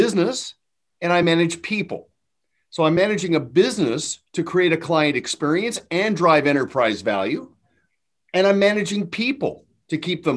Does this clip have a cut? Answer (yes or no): no